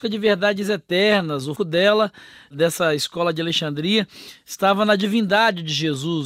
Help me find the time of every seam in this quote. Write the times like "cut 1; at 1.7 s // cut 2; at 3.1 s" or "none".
cut 1; at 1.6 s